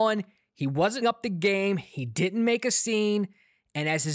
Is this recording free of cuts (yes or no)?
no